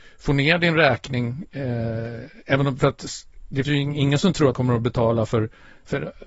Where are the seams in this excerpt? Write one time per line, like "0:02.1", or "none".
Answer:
0:02.8
0:03.6
0:04.5